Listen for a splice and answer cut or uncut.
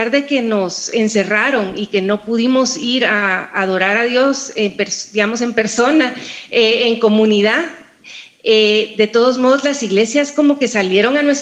uncut